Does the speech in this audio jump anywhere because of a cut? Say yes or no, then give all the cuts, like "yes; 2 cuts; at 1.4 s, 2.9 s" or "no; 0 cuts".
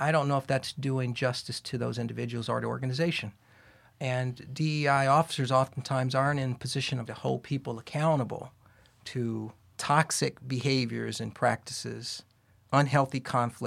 yes; 1 cut; at 7.1 s